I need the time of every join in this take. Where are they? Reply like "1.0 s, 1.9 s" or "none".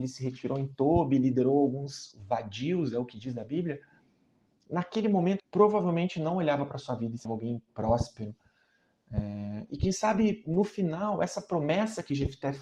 5.4 s, 7.2 s